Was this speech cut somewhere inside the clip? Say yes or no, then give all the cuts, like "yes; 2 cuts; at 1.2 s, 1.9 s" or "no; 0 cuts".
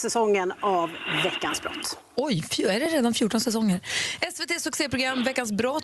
no; 0 cuts